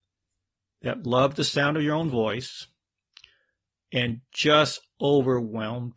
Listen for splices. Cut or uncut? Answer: uncut